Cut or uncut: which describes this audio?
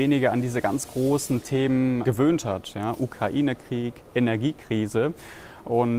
cut